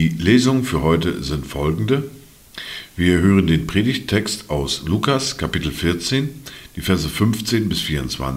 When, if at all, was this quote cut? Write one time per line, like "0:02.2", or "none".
none